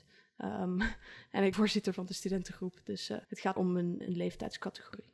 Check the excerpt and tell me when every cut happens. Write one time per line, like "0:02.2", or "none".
0:01.5
0:03.2
0:03.6
0:04.0